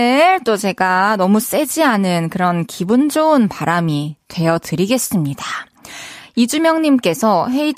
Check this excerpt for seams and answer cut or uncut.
uncut